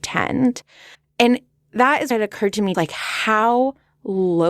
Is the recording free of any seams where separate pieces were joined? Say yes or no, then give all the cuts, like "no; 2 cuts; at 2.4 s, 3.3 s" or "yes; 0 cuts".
no; 3 cuts; at 0.9 s, 2.1 s, 2.7 s